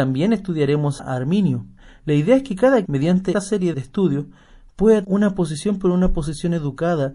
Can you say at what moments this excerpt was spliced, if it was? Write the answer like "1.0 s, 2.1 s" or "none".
1.0 s, 2.9 s, 3.3 s, 3.7 s, 5.0 s